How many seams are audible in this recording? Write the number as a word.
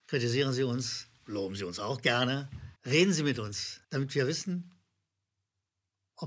two